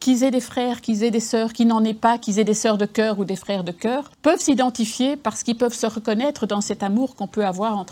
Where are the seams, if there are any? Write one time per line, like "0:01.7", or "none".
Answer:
0:04.1